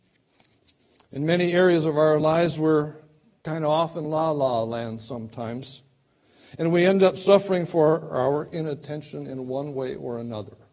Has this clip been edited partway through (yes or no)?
no